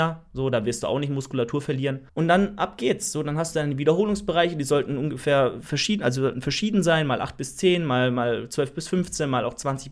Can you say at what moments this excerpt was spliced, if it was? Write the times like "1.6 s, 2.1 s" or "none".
2.1 s